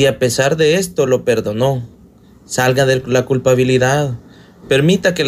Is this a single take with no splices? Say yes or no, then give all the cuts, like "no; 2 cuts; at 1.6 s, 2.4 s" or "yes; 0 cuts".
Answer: yes; 0 cuts